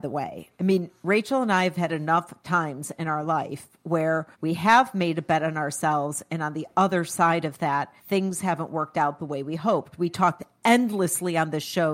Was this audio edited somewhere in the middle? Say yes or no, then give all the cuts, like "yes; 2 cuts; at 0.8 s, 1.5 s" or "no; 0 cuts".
yes; 2 cuts; at 4.3 s, 8.0 s